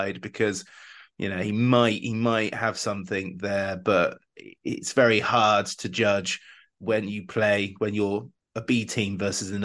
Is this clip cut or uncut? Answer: uncut